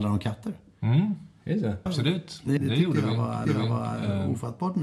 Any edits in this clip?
yes; 3 cuts; at 1.9 s, 2.6 s, 3.4 s

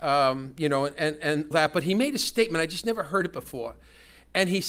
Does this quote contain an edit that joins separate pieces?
yes; 1 cut; at 1.5 s

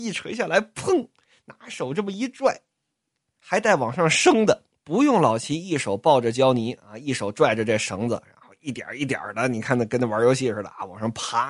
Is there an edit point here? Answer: yes; 1 cut; at 4.7 s

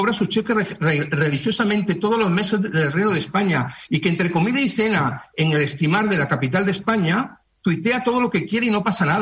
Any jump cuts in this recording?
no; 0 cuts

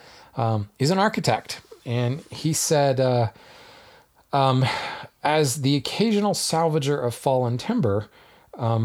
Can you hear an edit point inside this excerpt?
no; 0 cuts

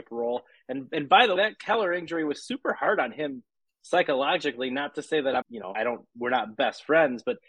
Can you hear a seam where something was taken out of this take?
yes; 3 cuts; at 1.4 s, 5.4 s, 5.7 s

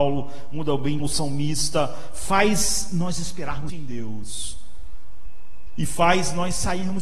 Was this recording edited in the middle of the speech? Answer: yes; 2 cuts; at 1.0 s, 3.7 s

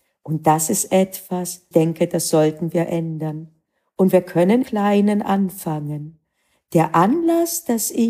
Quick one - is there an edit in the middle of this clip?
yes; 2 cuts; at 1.7 s, 4.6 s

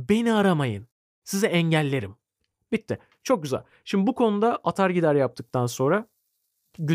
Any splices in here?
no; 0 cuts

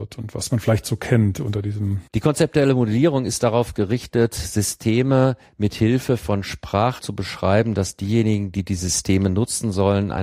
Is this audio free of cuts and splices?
no; 2 cuts; at 2.1 s, 7.0 s

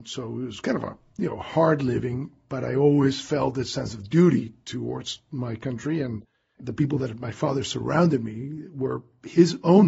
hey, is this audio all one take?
yes; 0 cuts

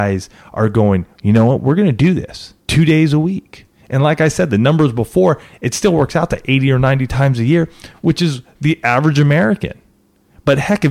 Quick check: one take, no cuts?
no; 1 cut; at 2.6 s

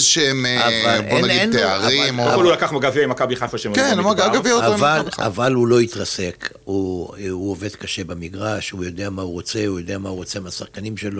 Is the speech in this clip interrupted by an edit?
no; 0 cuts

